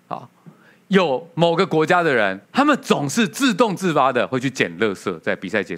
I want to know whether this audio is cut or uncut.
cut